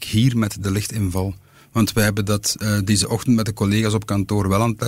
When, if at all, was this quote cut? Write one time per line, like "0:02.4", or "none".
none